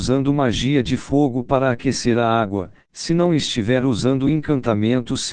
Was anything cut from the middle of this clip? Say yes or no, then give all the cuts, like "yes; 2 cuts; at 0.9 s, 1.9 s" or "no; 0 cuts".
no; 0 cuts